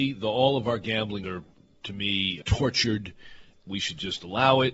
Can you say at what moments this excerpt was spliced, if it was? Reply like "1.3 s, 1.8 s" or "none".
1.2 s, 2.4 s